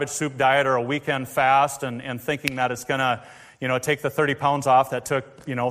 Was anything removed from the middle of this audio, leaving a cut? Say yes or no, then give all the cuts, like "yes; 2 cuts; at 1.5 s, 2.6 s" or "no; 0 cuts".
no; 0 cuts